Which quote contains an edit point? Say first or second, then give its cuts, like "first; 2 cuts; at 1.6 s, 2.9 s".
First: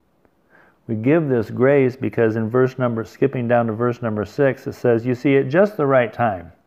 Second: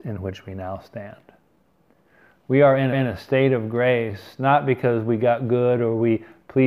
second; 1 cut; at 2.9 s